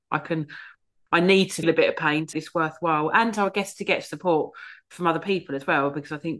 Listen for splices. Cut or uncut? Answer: cut